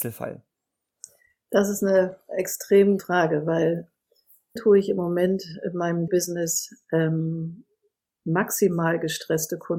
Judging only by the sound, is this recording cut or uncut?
cut